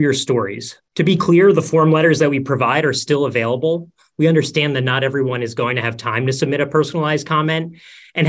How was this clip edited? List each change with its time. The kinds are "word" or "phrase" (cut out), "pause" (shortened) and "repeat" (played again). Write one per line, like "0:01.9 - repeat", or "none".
none